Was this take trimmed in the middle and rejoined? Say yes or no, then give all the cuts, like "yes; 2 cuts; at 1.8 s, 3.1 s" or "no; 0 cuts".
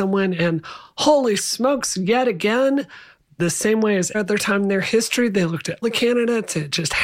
yes; 2 cuts; at 4.1 s, 5.8 s